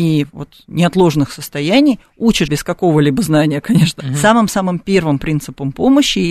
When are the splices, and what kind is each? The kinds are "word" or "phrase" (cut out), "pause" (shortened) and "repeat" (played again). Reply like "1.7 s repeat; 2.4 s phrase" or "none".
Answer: 2.5 s word; 4.0 s word